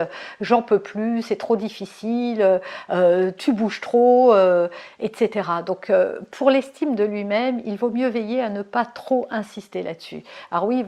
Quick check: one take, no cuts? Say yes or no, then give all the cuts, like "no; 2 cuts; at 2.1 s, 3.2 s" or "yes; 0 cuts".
yes; 0 cuts